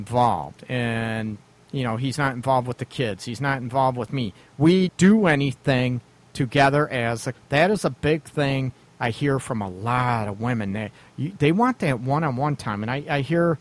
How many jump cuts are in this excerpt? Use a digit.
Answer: 2